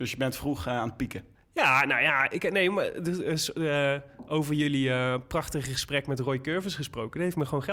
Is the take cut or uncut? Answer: cut